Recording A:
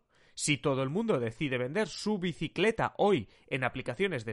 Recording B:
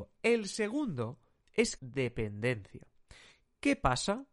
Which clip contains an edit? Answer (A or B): B